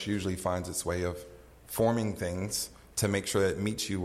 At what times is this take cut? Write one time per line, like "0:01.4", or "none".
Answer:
none